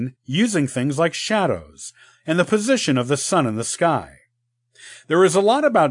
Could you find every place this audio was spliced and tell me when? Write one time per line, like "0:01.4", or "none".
none